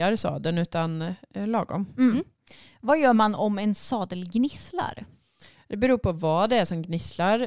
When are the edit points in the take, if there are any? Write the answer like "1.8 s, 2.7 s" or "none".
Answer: none